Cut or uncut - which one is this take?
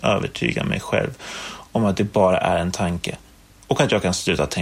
uncut